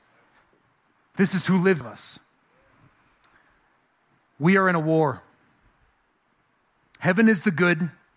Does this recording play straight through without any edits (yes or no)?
no